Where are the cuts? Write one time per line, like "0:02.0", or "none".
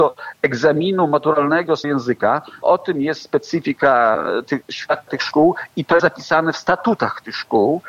0:01.8
0:02.6
0:05.1
0:06.0